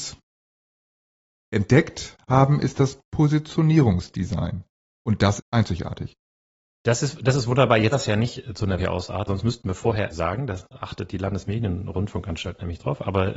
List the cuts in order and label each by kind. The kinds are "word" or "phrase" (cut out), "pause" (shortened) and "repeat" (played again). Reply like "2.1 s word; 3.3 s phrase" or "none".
5.4 s word; 7.9 s word; 8.8 s word; 9.3 s word; 10.1 s word